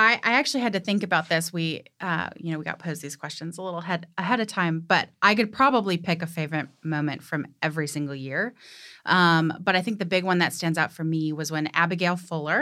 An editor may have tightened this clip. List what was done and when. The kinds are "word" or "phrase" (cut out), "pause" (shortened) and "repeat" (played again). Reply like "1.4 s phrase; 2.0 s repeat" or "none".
none